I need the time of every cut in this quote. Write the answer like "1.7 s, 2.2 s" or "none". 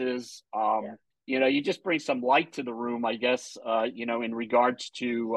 1.1 s